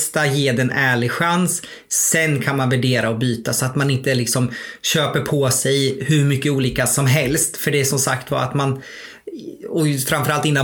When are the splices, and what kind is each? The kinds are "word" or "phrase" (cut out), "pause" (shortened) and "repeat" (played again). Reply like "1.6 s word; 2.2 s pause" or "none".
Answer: none

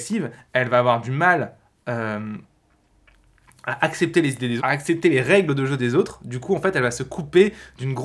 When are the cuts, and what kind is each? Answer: 4.6 s word

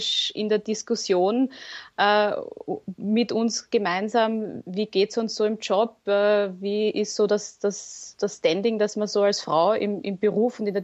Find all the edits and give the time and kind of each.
none

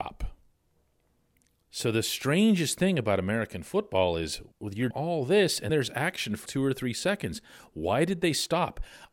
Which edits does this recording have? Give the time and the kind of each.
4.5 s pause; 4.9 s word; 5.7 s word; 6.5 s word

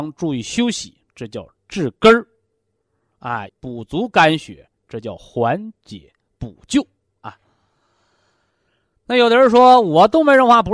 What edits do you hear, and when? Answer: 1.6 s pause; 3.5 s phrase

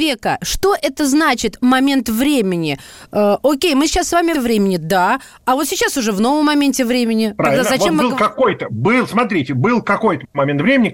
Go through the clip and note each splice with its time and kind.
4.3 s phrase

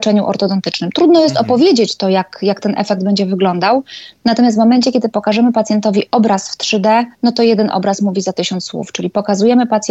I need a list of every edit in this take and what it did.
7.1 s pause

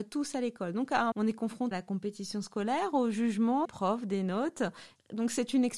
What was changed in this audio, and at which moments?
1.1 s word; 1.7 s word; 3.6 s word

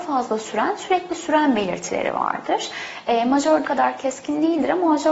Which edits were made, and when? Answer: 3.6 s word

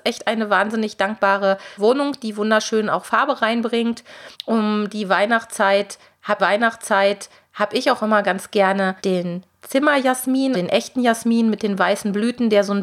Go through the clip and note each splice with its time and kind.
1.8 s phrase; 4.3 s pause; 6.4 s repeat; 9.0 s pause; 10.5 s word

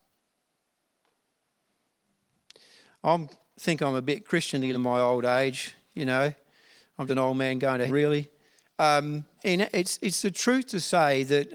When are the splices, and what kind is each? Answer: 4.7 s word; 7.1 s word; 7.9 s word; 9.4 s word

